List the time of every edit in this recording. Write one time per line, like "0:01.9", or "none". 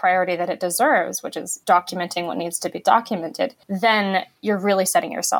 0:01.6
0:03.6